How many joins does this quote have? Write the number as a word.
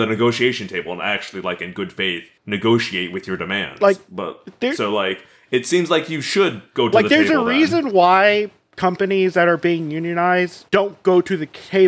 two